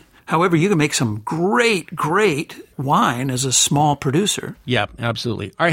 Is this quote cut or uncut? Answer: uncut